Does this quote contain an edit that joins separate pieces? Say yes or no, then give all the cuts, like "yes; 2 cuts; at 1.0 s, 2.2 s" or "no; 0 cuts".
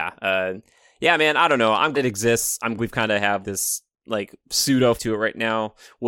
yes; 4 cuts; at 1.9 s, 2.8 s, 3.4 s, 5.0 s